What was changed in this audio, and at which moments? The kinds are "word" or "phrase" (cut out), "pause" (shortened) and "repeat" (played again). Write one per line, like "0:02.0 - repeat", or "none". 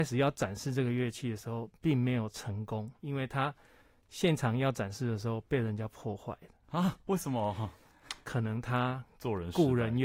0:03.0 - pause